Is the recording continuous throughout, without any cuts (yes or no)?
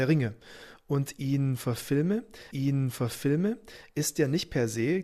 no